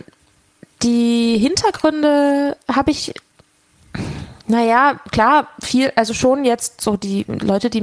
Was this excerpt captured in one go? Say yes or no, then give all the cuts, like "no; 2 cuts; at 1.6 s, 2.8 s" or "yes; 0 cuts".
no; 1 cut; at 4.4 s